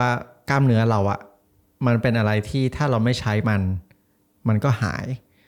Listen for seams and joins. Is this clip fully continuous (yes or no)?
yes